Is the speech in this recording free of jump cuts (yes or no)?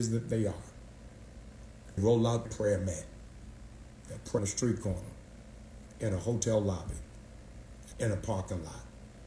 no